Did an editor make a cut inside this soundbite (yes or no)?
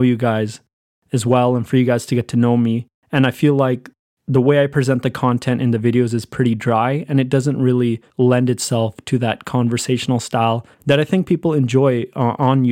yes